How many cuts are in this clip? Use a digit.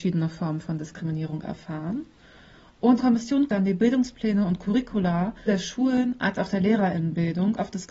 3